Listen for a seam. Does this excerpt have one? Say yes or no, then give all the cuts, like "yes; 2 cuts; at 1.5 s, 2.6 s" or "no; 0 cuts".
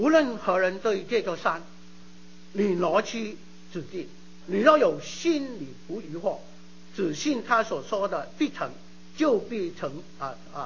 yes; 1 cut; at 4.4 s